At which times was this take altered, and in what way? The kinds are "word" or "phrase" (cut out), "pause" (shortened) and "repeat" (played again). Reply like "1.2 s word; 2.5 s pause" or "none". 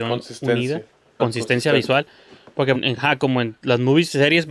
1.2 s word; 2.7 s word